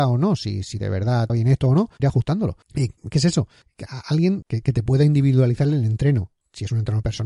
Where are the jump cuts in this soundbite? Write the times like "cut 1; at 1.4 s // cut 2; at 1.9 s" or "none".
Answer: cut 1; at 1.3 s // cut 2; at 2.0 s // cut 3; at 2.6 s // cut 4; at 4.4 s